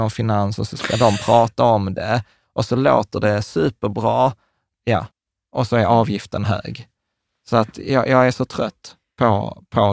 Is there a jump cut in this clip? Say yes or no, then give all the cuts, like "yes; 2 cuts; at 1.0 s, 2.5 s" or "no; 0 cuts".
no; 0 cuts